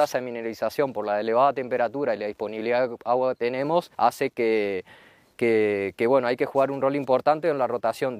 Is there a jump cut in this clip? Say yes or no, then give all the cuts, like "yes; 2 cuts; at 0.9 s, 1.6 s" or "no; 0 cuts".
yes; 1 cut; at 3.9 s